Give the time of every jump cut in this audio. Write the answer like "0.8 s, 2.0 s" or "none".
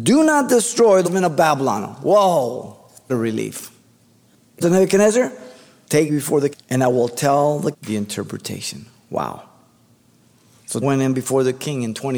1.0 s, 3.1 s, 4.6 s, 6.1 s, 6.5 s, 7.7 s, 10.8 s